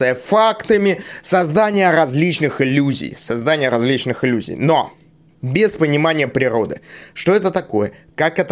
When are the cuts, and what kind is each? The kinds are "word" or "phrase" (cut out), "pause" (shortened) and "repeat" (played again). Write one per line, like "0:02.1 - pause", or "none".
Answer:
none